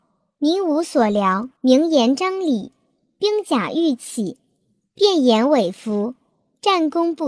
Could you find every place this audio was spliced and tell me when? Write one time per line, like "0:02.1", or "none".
0:01.6